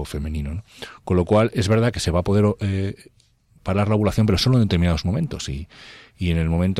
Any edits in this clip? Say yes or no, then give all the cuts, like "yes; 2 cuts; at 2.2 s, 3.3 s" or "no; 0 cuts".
no; 0 cuts